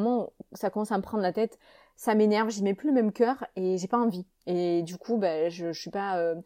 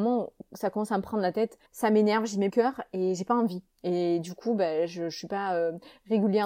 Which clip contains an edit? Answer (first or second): second